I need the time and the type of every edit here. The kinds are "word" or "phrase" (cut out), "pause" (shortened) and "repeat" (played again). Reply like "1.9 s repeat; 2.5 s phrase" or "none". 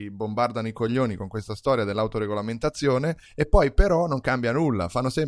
3.3 s pause

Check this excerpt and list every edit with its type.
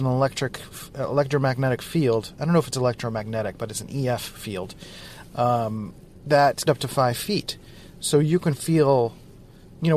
6.7 s phrase

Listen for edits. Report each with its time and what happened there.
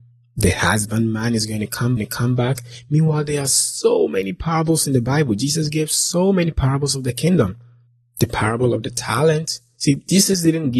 2.0 s repeat

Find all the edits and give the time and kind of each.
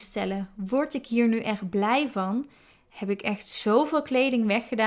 none

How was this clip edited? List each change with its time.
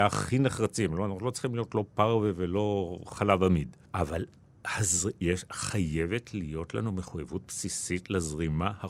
3.8 s pause

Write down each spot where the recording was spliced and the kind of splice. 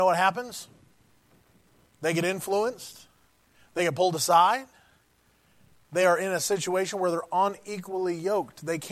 none

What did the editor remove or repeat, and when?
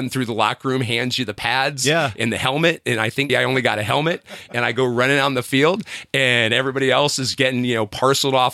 3.3 s word

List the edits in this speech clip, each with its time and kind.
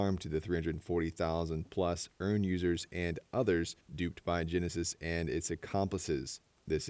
none

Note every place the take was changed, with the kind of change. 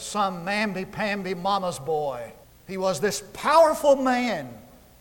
2.4 s pause

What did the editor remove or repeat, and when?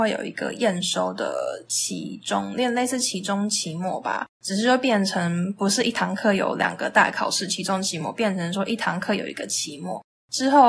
4.3 s pause

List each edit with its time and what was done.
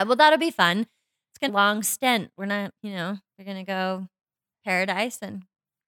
1.5 s phrase; 2.8 s pause; 3.2 s pause; 4.5 s word

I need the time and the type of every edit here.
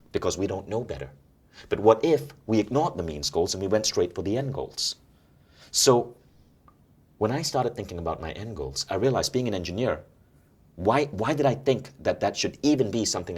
none

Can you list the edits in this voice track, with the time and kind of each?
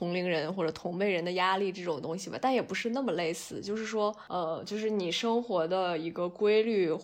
none

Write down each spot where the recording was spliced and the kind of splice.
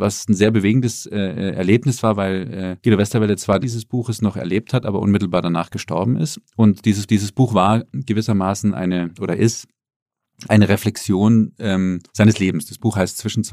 2.8 s word; 3.6 s phrase; 7.1 s repeat; 12.1 s pause

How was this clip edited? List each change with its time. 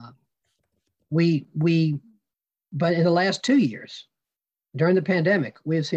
none

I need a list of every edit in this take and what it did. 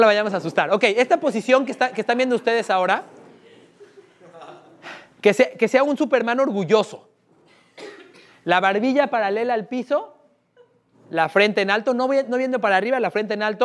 none

